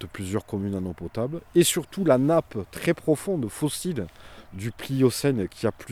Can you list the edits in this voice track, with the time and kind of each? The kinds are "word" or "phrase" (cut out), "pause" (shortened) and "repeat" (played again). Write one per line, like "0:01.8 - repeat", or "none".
none